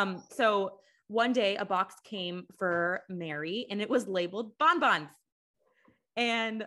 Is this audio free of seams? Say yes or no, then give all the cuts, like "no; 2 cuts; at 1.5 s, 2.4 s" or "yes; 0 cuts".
yes; 0 cuts